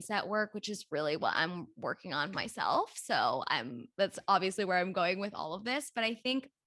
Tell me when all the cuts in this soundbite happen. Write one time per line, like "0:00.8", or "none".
none